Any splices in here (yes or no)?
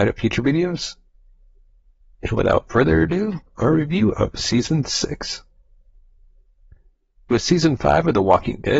no